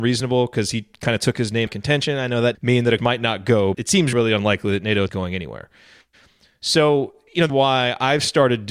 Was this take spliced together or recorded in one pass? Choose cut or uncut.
cut